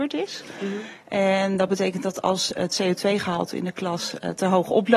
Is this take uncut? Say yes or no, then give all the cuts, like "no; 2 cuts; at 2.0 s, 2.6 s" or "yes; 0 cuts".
yes; 0 cuts